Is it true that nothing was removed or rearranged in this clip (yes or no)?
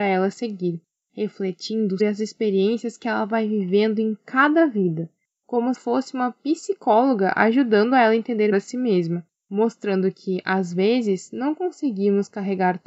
no